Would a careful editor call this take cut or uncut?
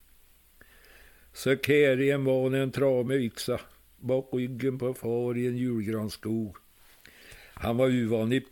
uncut